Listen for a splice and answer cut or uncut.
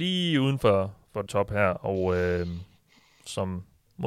cut